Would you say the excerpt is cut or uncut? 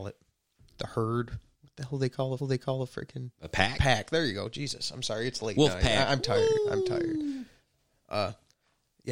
cut